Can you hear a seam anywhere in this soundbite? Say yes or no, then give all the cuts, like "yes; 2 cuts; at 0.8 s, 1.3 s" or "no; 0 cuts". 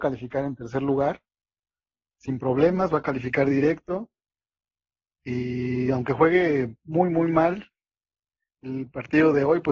no; 0 cuts